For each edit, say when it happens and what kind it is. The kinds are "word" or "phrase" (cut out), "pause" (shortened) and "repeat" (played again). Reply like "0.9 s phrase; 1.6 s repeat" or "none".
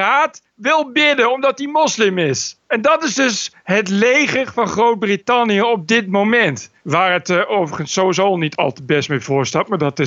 2.6 s pause; 6.8 s pause